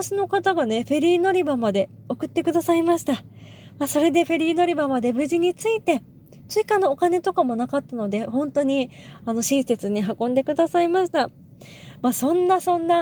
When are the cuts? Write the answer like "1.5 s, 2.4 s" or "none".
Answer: none